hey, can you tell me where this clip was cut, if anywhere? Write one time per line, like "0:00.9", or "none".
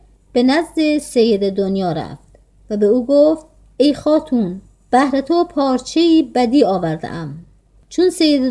none